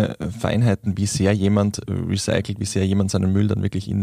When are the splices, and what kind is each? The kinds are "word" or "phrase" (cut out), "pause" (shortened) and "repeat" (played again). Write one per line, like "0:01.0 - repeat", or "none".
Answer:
none